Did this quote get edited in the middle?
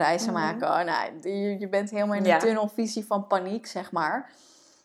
no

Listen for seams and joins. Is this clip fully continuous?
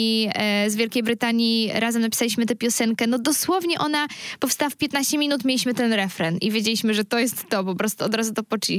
yes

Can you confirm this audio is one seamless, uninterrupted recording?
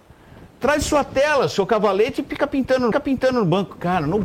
no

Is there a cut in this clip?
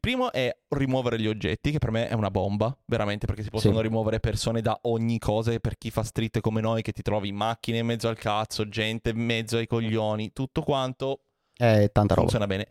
no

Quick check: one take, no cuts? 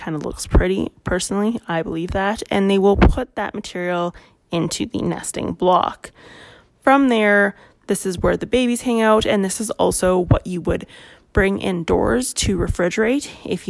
yes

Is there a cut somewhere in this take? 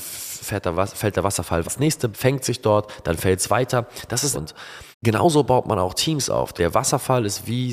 yes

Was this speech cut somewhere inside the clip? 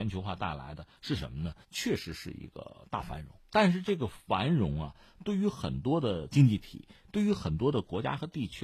yes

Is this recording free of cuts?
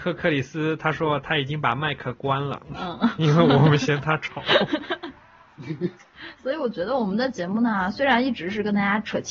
yes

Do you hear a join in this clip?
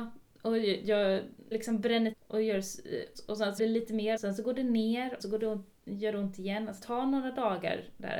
yes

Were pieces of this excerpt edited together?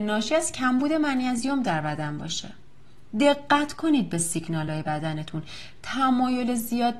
no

